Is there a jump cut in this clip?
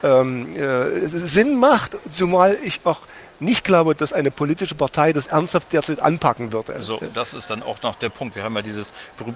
no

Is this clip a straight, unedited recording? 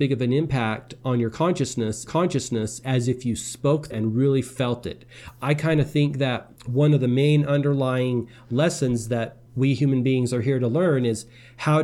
no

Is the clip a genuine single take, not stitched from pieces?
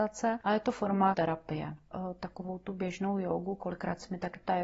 no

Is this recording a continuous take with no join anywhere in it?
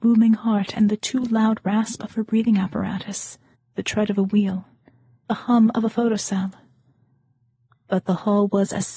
no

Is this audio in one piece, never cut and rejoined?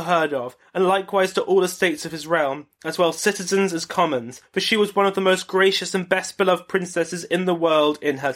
yes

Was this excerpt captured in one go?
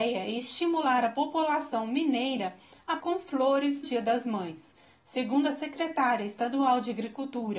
no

